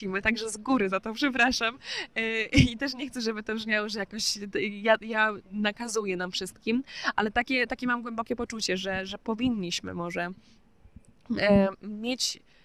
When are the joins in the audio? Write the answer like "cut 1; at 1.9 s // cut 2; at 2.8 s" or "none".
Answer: none